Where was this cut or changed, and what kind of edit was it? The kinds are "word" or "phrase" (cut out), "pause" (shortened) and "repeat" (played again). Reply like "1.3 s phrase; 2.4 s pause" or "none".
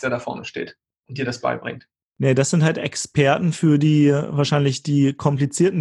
2.0 s pause